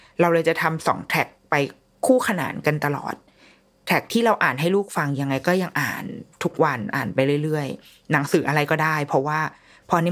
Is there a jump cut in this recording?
no; 0 cuts

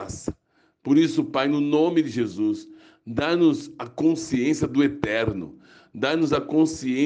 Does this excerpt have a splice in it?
no; 0 cuts

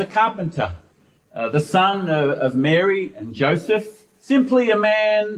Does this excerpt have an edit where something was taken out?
yes; 1 cut; at 4.1 s

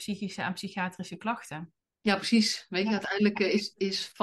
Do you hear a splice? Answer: yes; 1 cut; at 1.8 s

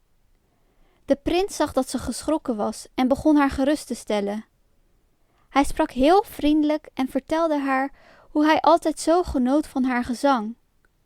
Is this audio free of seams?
yes; 0 cuts

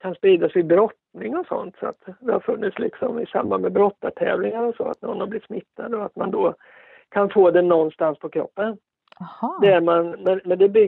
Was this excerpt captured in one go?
yes; 0 cuts

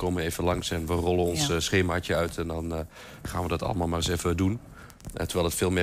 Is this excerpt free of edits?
yes; 0 cuts

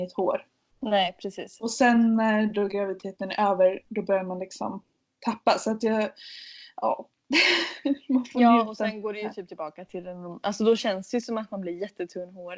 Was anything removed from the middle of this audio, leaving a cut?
no; 0 cuts

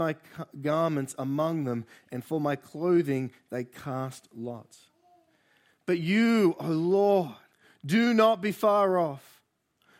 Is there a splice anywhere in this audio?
yes; 1 cut; at 7.5 s

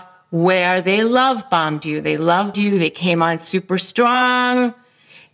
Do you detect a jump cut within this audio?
yes; 1 cut; at 2.5 s

